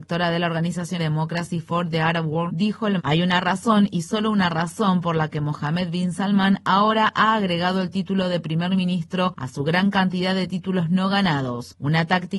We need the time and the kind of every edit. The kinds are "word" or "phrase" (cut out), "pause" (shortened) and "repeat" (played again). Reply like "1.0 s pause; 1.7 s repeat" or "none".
1.0 s word; 2.5 s word; 3.0 s word